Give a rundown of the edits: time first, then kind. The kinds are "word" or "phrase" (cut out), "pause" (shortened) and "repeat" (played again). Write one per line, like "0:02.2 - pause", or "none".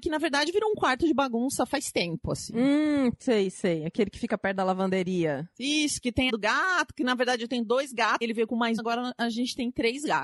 0:06.3 - word
0:08.2 - word
0:08.8 - word